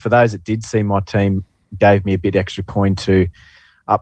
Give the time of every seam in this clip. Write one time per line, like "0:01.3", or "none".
none

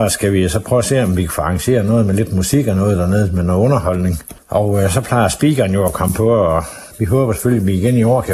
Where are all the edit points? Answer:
0:04.4
0:06.9

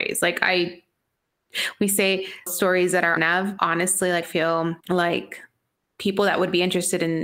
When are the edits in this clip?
0:02.5
0:03.2
0:03.6
0:04.2
0:04.8

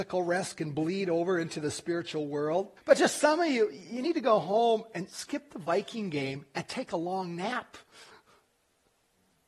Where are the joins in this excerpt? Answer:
0:02.8

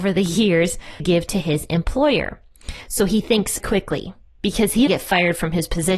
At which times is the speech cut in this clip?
0:01.0
0:03.6
0:04.9

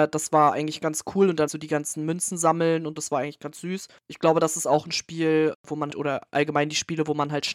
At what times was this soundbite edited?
0:01.5
0:03.0
0:04.0
0:05.9

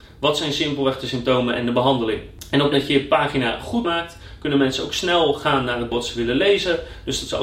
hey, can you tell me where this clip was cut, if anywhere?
0:02.7
0:03.8
0:05.9

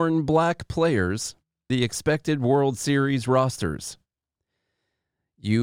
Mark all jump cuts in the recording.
0:01.7

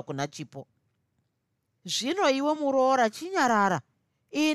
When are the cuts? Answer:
none

